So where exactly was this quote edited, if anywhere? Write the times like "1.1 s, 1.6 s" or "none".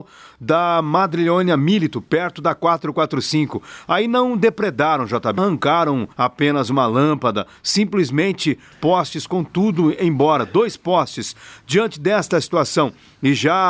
5.4 s, 6.1 s, 8.7 s